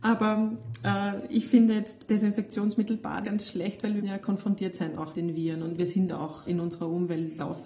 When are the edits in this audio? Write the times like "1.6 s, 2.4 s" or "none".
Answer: 2.1 s, 3.2 s, 4.0 s, 5.1 s, 6.4 s